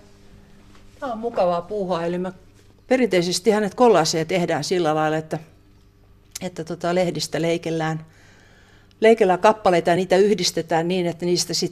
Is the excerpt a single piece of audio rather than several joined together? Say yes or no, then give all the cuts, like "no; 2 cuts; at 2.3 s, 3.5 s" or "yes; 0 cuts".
yes; 0 cuts